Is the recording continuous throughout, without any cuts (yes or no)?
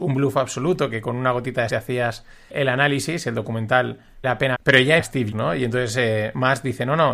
no